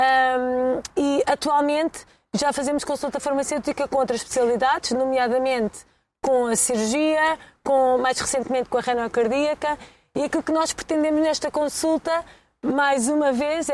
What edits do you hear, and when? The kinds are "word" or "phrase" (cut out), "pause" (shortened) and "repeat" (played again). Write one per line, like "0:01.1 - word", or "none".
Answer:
none

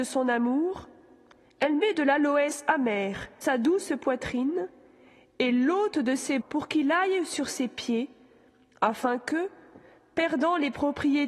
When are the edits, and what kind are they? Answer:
0:03.4 - word
0:06.4 - word

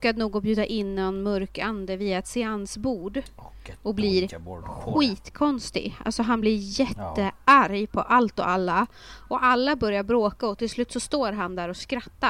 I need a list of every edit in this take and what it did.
none

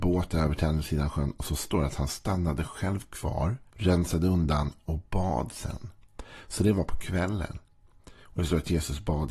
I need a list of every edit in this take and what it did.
0:03.7 - pause

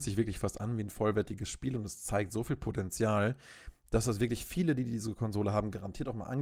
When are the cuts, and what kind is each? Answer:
none

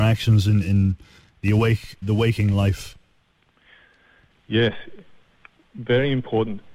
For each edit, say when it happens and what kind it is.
0:02.0 - word

